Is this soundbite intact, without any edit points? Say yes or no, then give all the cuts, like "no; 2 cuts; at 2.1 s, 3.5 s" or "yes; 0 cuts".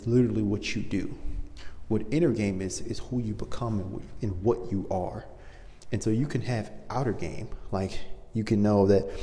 yes; 0 cuts